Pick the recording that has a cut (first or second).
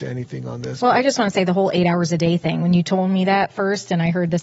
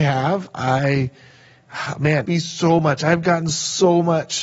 second